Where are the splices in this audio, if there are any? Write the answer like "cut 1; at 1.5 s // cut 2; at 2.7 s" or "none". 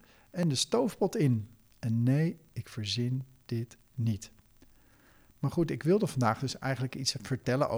cut 1; at 1.7 s